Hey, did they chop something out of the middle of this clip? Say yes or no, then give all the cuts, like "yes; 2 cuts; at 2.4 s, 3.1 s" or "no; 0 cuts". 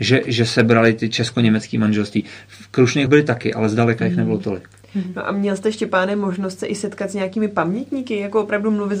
yes; 1 cut; at 3.1 s